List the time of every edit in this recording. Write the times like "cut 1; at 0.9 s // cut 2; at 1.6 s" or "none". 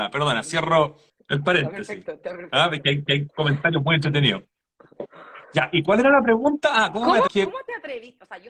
cut 1; at 1.1 s // cut 2; at 3.1 s // cut 3; at 5.4 s // cut 4; at 7.3 s